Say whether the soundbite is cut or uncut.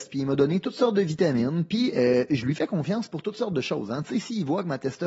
uncut